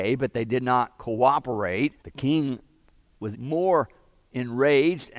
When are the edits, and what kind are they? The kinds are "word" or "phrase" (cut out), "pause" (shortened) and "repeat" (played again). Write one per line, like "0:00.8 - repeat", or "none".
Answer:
0:02.0 - pause
0:03.3 - word